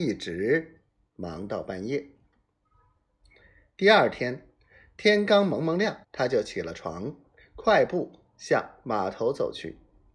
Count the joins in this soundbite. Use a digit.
1